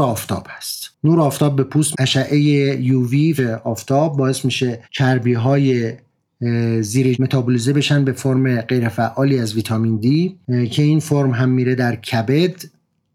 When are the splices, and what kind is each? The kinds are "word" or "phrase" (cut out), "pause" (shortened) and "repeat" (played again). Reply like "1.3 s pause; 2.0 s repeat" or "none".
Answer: 1.9 s word; 3.4 s word; 4.8 s pause; 7.1 s word

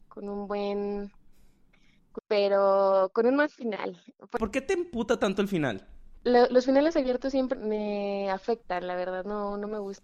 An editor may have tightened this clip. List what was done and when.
2.2 s phrase; 6.2 s pause; 7.5 s word

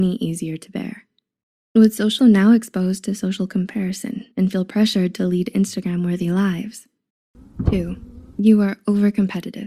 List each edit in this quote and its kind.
2.2 s phrase; 4.3 s pause

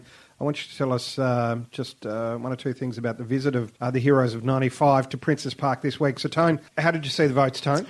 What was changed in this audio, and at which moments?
3.8 s pause; 6.7 s pause

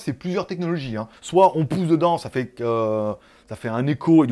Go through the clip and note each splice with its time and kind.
1.2 s pause

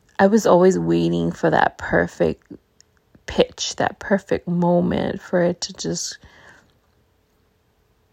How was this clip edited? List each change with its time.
none

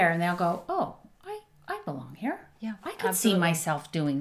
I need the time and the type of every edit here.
none

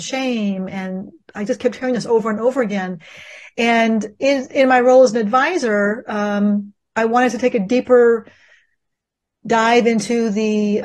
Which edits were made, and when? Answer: none

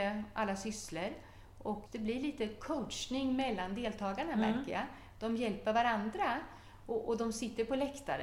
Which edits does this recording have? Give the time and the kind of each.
1.9 s word

